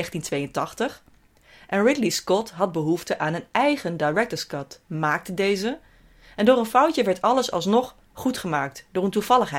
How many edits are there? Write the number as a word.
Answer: zero